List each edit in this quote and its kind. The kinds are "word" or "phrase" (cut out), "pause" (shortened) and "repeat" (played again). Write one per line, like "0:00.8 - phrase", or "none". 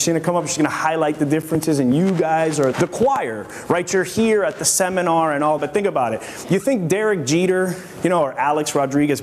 0:02.7 - word
0:05.6 - word